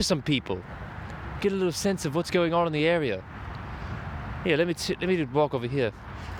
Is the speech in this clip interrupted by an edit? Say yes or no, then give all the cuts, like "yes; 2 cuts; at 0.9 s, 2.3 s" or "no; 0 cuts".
no; 0 cuts